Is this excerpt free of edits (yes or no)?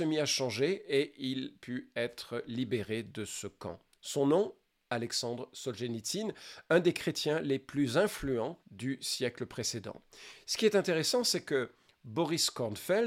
no